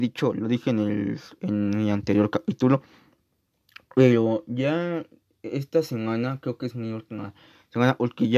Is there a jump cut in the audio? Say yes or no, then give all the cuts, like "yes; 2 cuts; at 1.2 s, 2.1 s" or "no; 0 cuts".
no; 0 cuts